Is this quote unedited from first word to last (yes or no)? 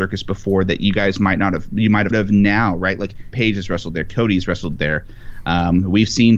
no